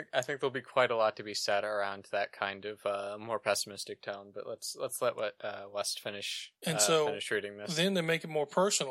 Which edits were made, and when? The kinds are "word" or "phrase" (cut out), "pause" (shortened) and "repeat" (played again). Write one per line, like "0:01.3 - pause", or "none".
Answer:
0:06.6 - pause